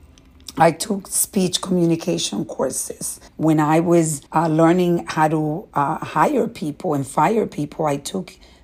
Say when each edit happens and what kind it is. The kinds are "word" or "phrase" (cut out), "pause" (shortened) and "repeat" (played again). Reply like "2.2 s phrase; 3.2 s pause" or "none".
3.3 s pause; 4.3 s pause